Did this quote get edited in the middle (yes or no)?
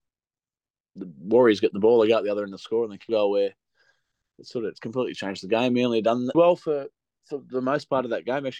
yes